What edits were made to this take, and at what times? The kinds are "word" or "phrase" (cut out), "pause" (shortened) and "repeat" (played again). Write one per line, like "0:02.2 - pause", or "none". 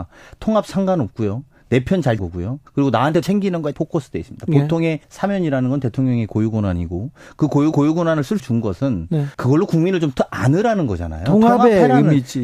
0:02.2 - word
0:02.7 - pause
0:03.2 - phrase
0:03.7 - word
0:05.0 - pause
0:07.7 - repeat
0:08.4 - phrase
0:09.3 - pause